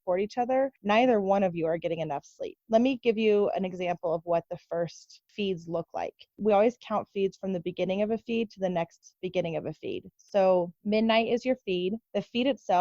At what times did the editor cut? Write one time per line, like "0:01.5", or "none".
none

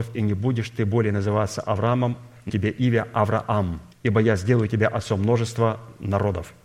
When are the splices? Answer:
0:02.5
0:03.9

